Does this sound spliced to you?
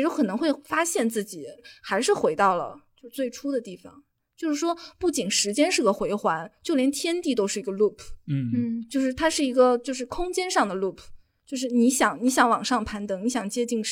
no; 0 cuts

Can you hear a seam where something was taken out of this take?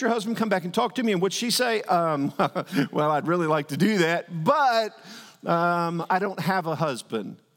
no; 0 cuts

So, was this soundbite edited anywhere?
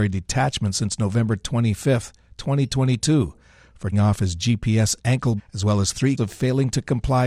yes; 3 cuts; at 3.9 s, 5.4 s, 6.2 s

